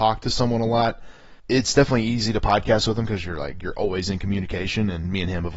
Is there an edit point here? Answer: yes; 1 cut; at 1.4 s

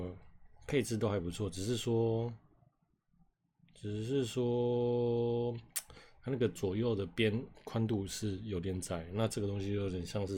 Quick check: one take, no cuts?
yes; 0 cuts

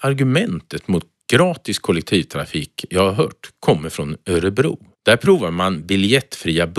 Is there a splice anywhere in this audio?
yes; 1 cut; at 4.9 s

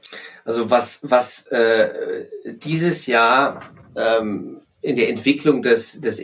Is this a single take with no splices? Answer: yes; 0 cuts

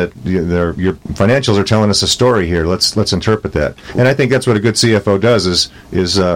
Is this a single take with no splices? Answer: yes; 0 cuts

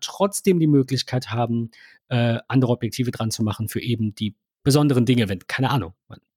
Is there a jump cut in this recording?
no; 0 cuts

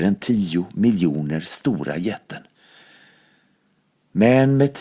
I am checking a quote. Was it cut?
no; 0 cuts

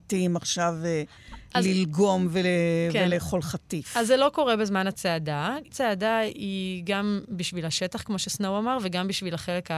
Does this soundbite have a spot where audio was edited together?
yes; 1 cut; at 5.7 s

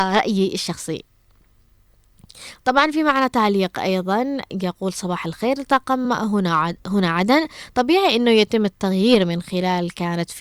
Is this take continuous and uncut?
yes; 0 cuts

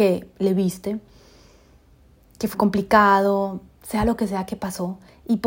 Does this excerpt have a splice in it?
yes; 1 cut; at 2.5 s

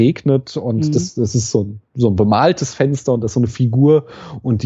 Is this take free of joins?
yes; 0 cuts

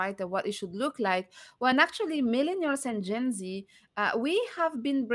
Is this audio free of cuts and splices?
yes; 0 cuts

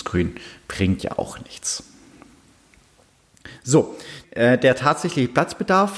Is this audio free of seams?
no; 2 cuts; at 1.0 s, 4.2 s

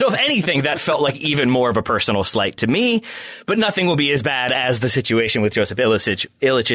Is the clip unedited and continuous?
yes; 0 cuts

